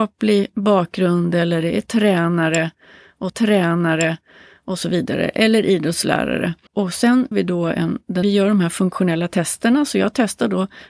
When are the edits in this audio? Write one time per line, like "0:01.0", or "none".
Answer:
0:03.3
0:06.7
0:07.3
0:08.2